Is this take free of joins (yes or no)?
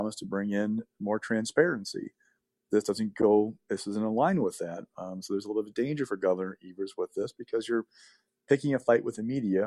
yes